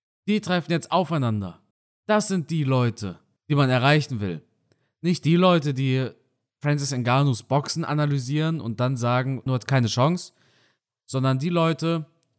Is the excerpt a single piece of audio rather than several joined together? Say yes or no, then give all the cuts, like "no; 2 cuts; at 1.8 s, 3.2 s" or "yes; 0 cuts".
no; 3 cuts; at 1.7 s, 3.4 s, 9.5 s